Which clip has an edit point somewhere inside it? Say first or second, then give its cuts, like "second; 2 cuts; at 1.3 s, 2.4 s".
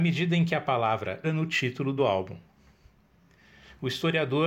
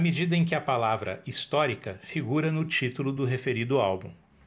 first; 2 cuts; at 1.2 s, 2.0 s